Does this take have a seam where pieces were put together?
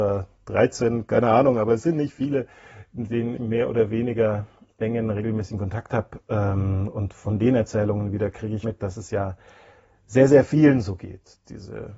yes; 2 cuts; at 3.4 s, 8.6 s

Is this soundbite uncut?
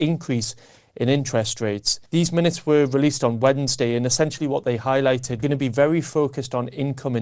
no; 2 cuts; at 2.1 s, 5.4 s

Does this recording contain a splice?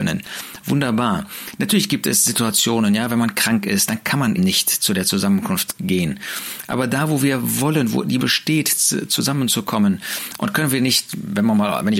yes; 2 cuts; at 4.4 s, 8.2 s

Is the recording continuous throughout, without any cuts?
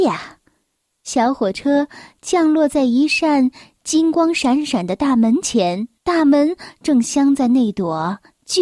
no; 1 cut; at 6.0 s

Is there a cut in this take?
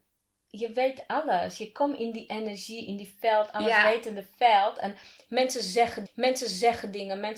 yes; 1 cut; at 6.1 s

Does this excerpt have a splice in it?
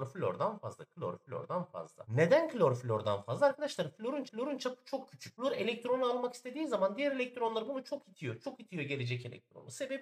yes; 1 cut; at 4.3 s

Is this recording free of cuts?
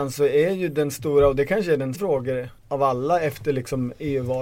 no; 2 cuts; at 1.9 s, 2.6 s

